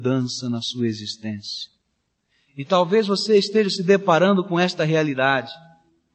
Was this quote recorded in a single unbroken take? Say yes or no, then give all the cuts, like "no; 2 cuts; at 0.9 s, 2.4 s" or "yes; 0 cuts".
yes; 0 cuts